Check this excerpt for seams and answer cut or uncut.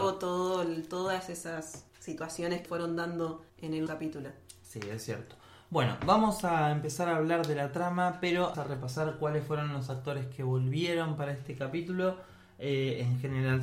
cut